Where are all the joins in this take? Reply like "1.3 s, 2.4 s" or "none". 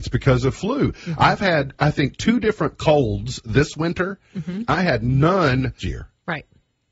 5.8 s